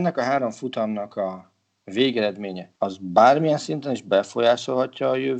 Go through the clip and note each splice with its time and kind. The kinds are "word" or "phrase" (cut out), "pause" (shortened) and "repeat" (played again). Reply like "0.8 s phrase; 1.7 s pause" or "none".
2.8 s pause